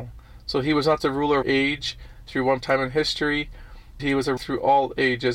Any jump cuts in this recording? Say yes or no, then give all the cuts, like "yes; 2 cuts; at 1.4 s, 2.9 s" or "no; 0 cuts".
yes; 5 cuts; at 1.0 s, 1.4 s, 2.6 s, 4.0 s, 4.4 s